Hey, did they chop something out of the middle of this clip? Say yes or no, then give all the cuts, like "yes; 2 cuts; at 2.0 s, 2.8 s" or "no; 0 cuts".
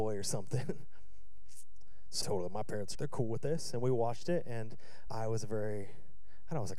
yes; 3 cuts; at 2.2 s, 2.9 s, 5.1 s